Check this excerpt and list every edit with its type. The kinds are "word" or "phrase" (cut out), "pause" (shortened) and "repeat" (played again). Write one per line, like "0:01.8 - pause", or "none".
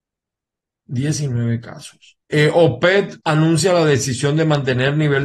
0:02.2 - pause
0:03.2 - pause